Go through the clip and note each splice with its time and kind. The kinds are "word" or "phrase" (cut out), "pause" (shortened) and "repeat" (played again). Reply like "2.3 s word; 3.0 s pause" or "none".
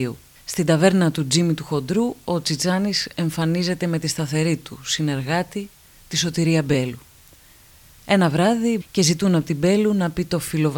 8.8 s phrase